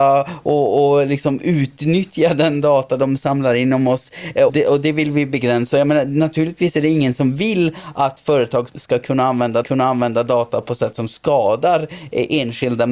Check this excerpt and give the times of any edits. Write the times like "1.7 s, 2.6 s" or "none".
4.5 s, 8.7 s, 9.6 s